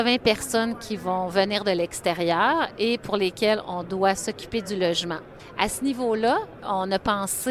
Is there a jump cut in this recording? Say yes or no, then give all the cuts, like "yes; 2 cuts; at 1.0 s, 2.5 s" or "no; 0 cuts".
no; 0 cuts